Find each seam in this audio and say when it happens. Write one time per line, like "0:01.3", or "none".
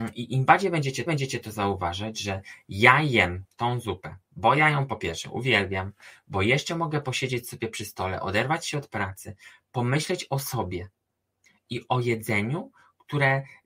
0:01.1